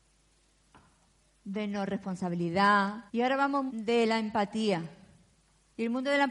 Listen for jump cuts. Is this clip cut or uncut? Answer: cut